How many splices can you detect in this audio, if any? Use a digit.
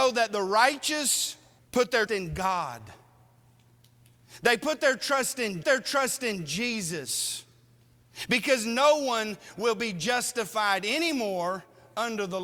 3